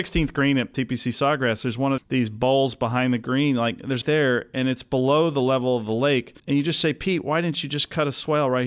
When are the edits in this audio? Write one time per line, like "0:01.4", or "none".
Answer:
0:02.0
0:04.0
0:06.4